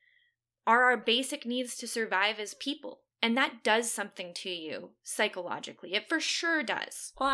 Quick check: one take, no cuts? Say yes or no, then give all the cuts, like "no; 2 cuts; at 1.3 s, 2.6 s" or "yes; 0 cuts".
no; 1 cut; at 3.1 s